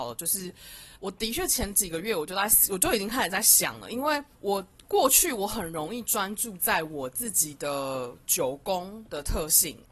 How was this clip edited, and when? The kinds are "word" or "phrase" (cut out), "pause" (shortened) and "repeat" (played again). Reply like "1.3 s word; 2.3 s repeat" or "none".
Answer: 0.9 s pause; 4.3 s pause